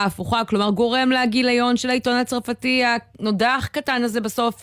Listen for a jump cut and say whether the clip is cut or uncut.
uncut